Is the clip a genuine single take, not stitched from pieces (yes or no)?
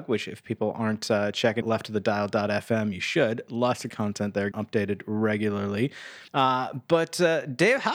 no